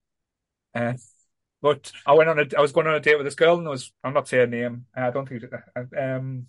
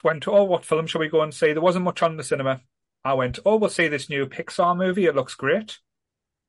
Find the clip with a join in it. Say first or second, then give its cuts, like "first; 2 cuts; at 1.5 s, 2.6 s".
first; 2 cuts; at 2.1 s, 3.9 s